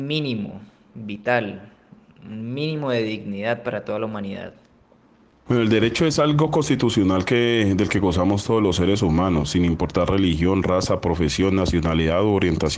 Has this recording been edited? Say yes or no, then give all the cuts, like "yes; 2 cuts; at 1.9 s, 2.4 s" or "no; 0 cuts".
no; 0 cuts